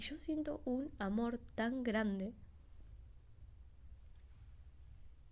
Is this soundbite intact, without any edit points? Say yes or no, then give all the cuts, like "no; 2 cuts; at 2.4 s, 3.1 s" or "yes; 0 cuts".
yes; 0 cuts